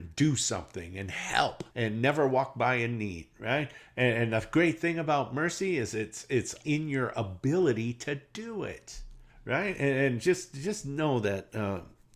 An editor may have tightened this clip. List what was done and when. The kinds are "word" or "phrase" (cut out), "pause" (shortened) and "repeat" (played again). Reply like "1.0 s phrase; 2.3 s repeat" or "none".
1.7 s pause; 6.6 s word; 9.3 s pause